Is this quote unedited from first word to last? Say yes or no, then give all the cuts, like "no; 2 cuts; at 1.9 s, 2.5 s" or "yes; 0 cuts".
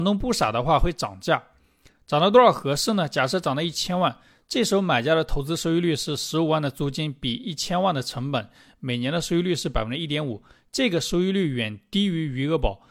yes; 0 cuts